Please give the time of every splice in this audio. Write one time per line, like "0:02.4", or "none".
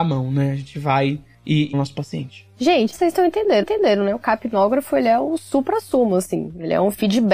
0:01.7
0:02.9
0:03.6

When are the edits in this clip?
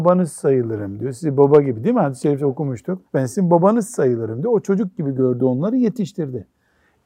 0:03.1

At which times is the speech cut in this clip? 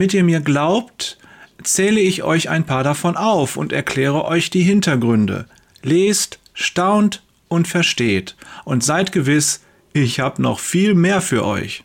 none

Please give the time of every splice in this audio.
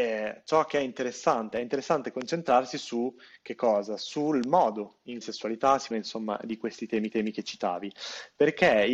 0:05.2
0:05.9
0:07.1

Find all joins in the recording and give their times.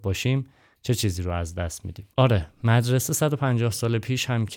0:02.1

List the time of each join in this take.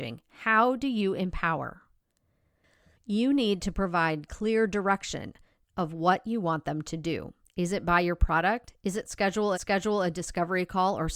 0:07.4
0:09.5

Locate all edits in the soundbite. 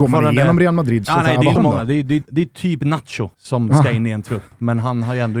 0:01.0
0:01.6
0:02.2
0:03.3

